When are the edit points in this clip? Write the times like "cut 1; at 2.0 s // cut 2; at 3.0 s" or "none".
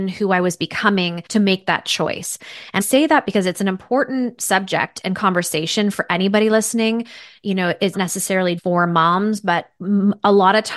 cut 1; at 1.3 s // cut 2; at 2.8 s // cut 3; at 7.9 s // cut 4; at 8.6 s